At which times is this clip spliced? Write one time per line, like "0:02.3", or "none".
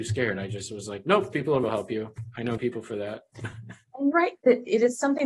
0:01.3
0:01.6
0:02.6
0:04.1